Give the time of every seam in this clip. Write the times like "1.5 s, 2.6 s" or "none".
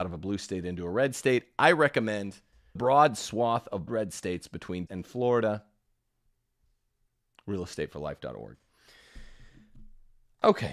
2.8 s, 3.9 s, 4.9 s